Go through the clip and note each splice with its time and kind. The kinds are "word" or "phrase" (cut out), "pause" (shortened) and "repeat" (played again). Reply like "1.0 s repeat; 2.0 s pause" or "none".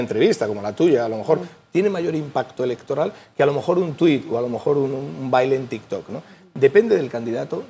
none